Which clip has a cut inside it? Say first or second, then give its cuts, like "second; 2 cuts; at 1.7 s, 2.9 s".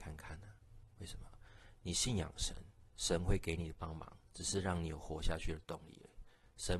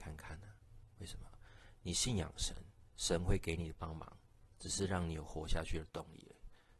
first; 1 cut; at 4.2 s